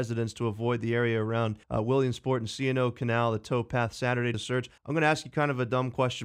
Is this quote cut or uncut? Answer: cut